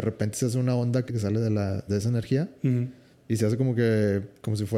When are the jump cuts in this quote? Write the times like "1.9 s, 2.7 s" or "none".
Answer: 1.1 s, 1.9 s, 3.1 s